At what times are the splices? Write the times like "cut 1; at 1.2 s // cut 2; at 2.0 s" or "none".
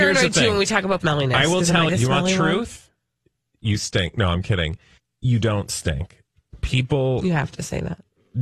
cut 1; at 1.0 s // cut 2; at 1.9 s // cut 3; at 5.0 s